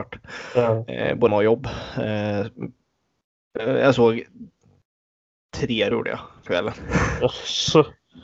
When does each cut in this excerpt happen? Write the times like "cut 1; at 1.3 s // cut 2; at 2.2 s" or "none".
cut 1; at 1.3 s // cut 2; at 5.9 s // cut 3; at 6.5 s